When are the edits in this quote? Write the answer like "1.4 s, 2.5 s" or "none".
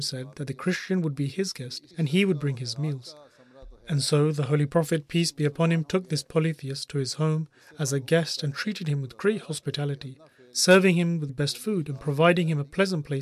1.9 s, 11.3 s